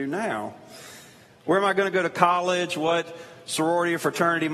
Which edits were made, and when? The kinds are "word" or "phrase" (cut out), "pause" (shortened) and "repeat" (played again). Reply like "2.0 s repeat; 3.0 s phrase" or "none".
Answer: none